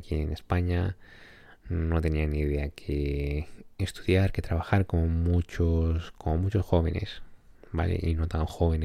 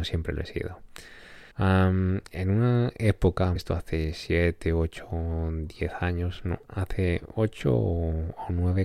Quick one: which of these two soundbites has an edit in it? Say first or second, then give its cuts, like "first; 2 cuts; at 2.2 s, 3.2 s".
second; 2 cuts; at 1.5 s, 3.6 s